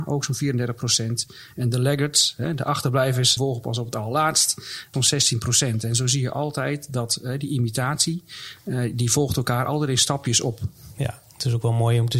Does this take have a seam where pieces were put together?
yes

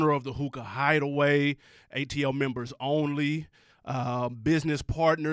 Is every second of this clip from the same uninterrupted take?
yes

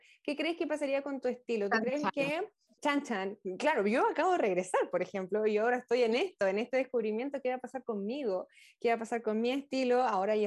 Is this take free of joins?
yes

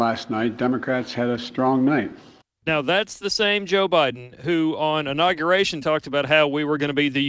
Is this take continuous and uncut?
no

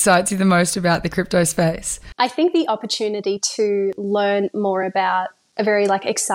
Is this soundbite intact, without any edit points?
yes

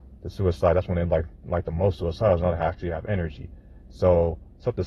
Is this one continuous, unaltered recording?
yes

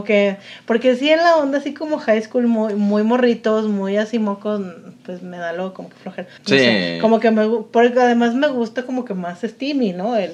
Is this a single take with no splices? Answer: no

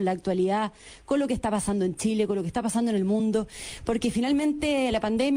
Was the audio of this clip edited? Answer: no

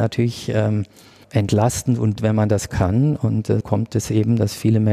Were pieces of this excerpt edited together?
yes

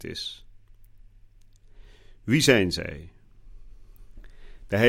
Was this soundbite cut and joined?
no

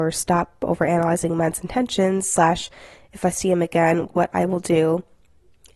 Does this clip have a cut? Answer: no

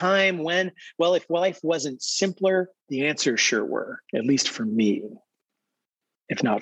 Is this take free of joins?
no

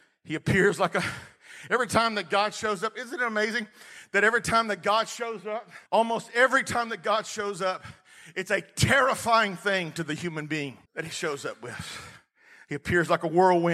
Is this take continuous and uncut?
no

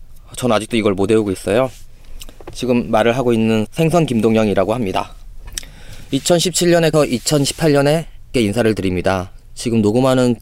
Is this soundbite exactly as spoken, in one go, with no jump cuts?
no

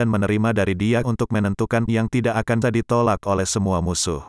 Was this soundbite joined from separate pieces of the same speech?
yes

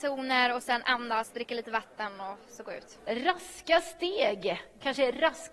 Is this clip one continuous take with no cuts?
yes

